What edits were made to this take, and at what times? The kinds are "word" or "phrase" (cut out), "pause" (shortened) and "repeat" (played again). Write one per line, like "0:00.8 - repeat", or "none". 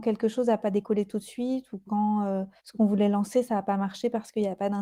0:02.6 - pause